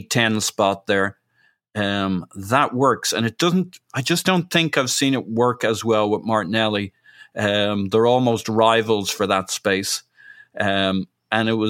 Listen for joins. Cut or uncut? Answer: uncut